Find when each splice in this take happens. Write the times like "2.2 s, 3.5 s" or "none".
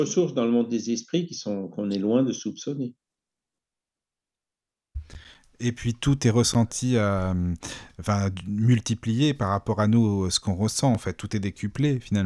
none